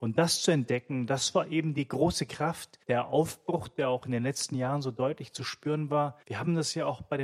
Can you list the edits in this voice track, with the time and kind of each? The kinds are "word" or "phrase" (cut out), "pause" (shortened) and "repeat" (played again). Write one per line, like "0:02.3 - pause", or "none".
0:02.8 - pause
0:06.2 - pause